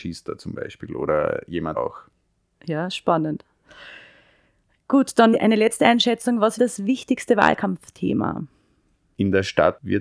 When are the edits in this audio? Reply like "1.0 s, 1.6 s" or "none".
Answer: 1.7 s, 5.3 s, 6.6 s

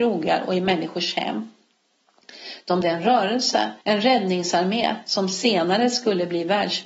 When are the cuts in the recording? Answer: 2.8 s, 3.8 s

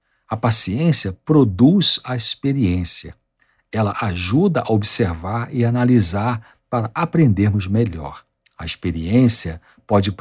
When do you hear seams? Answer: none

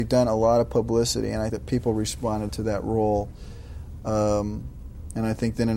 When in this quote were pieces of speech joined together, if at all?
1.5 s, 2.5 s

